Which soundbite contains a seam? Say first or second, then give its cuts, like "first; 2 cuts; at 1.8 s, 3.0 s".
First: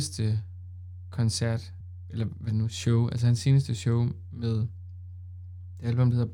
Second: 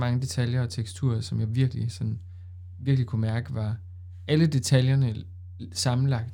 first; 1 cut; at 2.5 s